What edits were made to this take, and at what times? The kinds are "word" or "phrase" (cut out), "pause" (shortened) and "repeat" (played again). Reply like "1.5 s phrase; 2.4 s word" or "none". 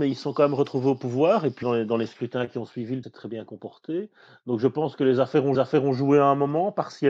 1.6 s word; 3.0 s word; 5.5 s repeat